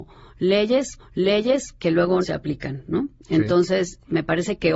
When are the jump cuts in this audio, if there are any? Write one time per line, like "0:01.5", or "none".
0:01.0
0:02.2